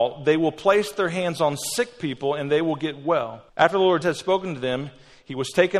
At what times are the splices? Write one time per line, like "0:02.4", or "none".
0:03.5
0:04.0